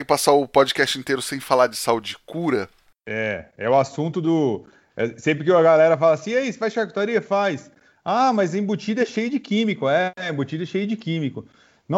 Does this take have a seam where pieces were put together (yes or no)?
no